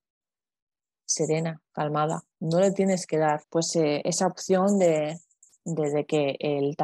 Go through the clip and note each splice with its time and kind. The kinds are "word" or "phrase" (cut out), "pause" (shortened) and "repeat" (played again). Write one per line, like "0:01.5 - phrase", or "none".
0:02.3 - pause
0:03.4 - pause
0:05.4 - pause